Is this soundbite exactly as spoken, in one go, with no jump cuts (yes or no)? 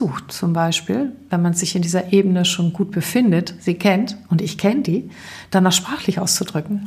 yes